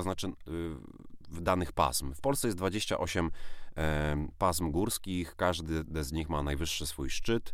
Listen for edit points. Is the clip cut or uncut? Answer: uncut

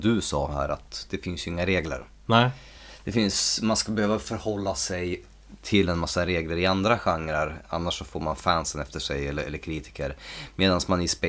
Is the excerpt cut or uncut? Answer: uncut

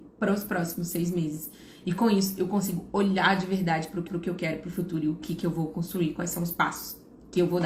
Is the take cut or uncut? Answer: cut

